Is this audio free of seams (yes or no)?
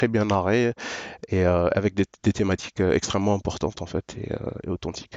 yes